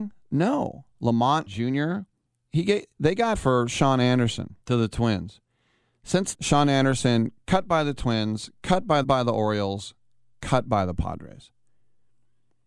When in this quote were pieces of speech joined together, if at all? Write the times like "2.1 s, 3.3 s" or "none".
1.5 s, 2.3 s, 3.3 s, 4.6 s, 6.3 s, 9.0 s